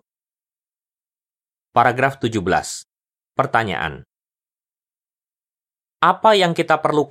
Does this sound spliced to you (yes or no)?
no